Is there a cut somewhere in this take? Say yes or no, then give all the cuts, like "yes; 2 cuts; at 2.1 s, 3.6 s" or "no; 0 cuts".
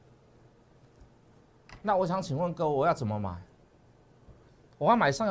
no; 0 cuts